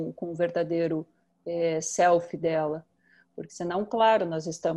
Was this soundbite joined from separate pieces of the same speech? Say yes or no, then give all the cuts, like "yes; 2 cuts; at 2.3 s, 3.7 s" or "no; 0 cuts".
no; 0 cuts